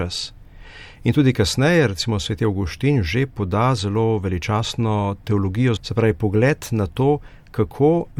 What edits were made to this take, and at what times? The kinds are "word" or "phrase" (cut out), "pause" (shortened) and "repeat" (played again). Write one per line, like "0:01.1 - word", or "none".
0:05.8 - word